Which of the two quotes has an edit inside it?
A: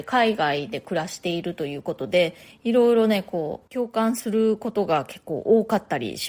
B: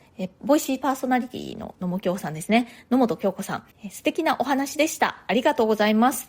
B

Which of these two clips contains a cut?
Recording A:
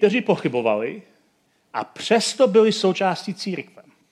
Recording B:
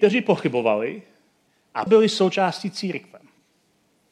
B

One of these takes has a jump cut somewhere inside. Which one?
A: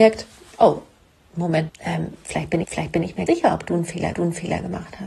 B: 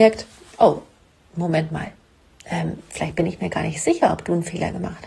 A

